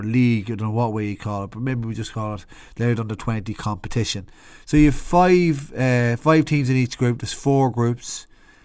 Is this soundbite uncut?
yes; 0 cuts

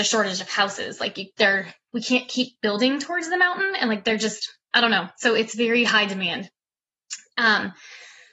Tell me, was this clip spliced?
no; 0 cuts

